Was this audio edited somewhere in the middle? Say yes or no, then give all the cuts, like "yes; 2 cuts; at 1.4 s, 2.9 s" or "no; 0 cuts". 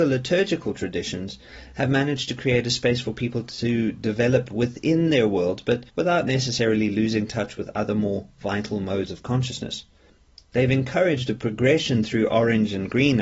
yes; 1 cut; at 5.9 s